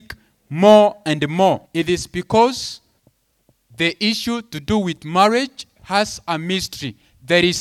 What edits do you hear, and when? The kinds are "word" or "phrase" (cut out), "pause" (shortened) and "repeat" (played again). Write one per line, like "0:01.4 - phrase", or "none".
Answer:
0:01.7 - pause
0:03.0 - pause